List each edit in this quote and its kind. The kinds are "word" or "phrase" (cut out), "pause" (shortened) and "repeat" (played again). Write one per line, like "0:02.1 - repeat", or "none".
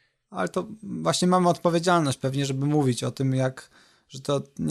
none